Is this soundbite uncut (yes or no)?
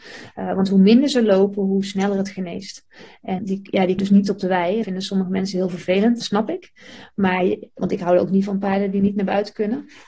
no